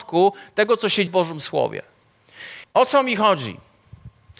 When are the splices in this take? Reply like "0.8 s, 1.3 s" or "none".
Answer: 1.1 s, 2.6 s